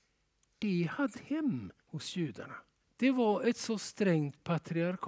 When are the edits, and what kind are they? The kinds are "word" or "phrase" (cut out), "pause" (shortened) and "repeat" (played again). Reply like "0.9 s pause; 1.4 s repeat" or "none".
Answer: 1.1 s phrase; 1.8 s pause; 2.8 s pause